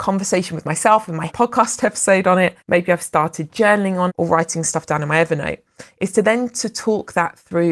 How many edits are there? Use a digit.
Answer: 3